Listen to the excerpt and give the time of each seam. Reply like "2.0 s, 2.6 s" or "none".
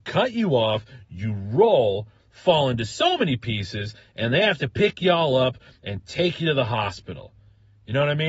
none